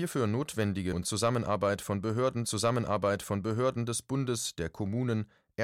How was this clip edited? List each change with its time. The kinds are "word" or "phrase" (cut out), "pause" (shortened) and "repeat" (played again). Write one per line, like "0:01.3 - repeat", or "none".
0:00.9 - word
0:02.4 - repeat
0:04.5 - phrase